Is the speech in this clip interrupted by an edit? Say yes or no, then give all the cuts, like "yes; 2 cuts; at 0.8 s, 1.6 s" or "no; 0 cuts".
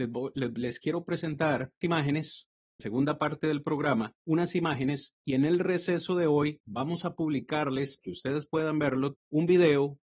yes; 5 cuts; at 1.8 s, 2.8 s, 4.2 s, 8.0 s, 9.1 s